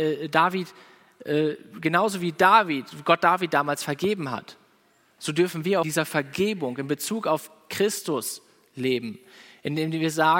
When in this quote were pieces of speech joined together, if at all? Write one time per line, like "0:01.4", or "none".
0:05.8